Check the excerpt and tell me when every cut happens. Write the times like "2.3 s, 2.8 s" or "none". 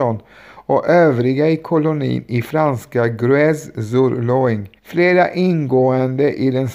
4.8 s

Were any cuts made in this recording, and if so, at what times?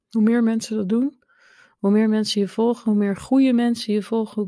none

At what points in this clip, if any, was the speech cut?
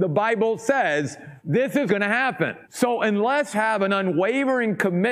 1.4 s, 1.9 s, 2.6 s, 3.5 s

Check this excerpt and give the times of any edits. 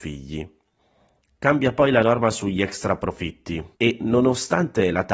3.7 s

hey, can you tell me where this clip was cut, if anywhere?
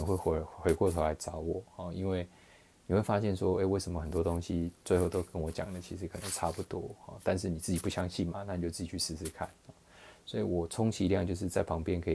none

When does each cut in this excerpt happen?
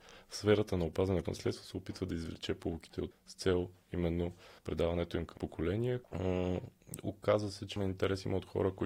1.2 s, 3.1 s, 4.6 s, 5.4 s, 6.0 s, 7.8 s

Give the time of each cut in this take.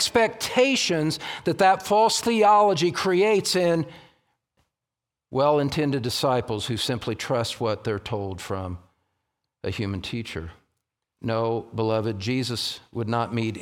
none

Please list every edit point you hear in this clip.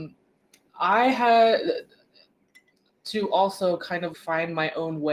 4.1 s

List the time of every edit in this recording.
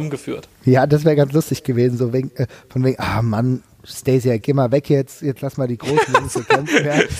4.4 s

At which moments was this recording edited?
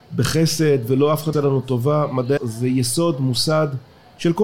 1.3 s, 2.4 s

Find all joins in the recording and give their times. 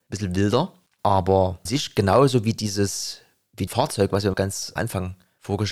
1.7 s, 3.7 s, 4.3 s, 4.8 s

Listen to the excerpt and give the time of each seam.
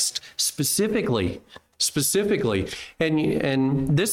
1.7 s

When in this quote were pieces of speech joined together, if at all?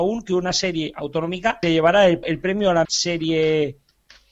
1.6 s, 2.2 s, 2.8 s

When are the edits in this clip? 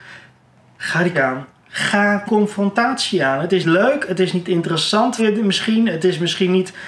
1.1 s, 2.3 s, 3.6 s, 5.2 s

